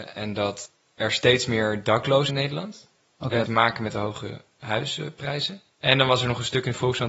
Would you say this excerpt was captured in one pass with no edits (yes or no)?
no